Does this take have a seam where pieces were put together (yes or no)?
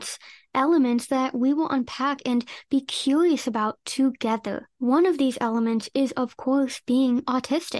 yes